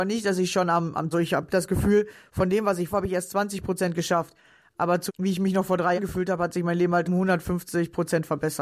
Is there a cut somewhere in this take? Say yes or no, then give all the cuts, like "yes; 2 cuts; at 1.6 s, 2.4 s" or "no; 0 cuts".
yes; 5 cuts; at 1.1 s, 2.9 s, 5.1 s, 6.0 s, 7.1 s